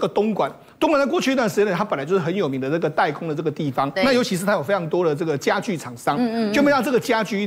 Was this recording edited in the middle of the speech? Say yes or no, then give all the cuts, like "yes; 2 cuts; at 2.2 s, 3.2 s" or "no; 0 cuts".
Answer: no; 0 cuts